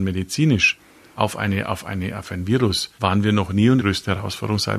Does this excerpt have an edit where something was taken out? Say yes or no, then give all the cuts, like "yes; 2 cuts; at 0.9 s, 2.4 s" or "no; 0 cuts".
yes; 2 cuts; at 3.0 s, 3.8 s